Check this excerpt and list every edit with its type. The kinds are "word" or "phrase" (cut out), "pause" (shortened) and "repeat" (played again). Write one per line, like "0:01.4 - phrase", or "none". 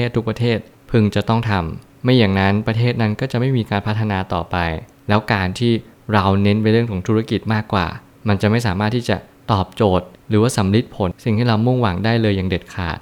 none